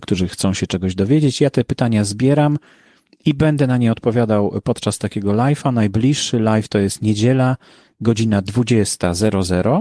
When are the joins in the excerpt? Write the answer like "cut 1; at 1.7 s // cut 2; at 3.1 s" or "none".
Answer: none